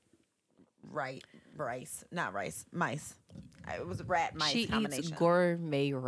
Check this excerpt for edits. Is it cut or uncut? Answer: uncut